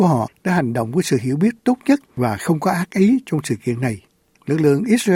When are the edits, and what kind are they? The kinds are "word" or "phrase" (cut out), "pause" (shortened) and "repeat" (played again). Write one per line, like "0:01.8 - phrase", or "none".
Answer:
none